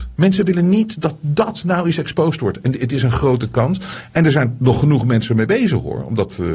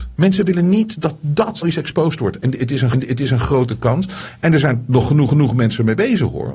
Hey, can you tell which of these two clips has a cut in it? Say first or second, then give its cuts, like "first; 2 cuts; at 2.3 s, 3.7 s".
second; 3 cuts; at 1.6 s, 2.9 s, 5.3 s